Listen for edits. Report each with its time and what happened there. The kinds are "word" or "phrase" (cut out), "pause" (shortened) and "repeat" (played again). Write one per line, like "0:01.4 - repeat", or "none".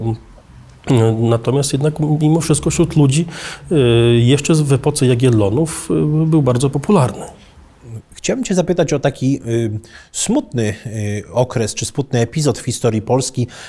none

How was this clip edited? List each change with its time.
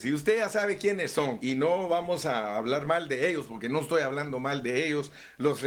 0:01.4 - word

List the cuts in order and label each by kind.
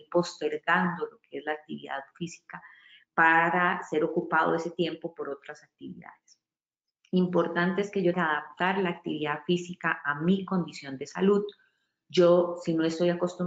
0:08.1 - word

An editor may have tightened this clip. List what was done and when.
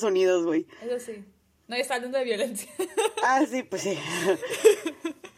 none

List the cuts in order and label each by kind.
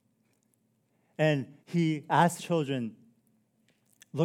0:01.6 - pause
0:02.4 - word

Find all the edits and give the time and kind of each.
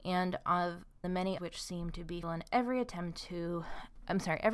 0:01.0 - word
0:01.4 - word
0:02.2 - word

